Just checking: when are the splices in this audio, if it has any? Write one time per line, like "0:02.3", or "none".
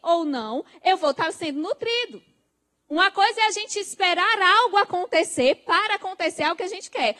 0:02.5